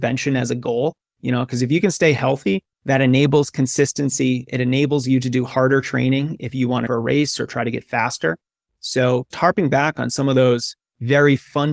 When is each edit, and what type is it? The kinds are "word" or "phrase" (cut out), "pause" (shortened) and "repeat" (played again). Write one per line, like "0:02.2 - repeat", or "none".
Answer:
0:02.7 - pause
0:06.9 - phrase
0:09.3 - word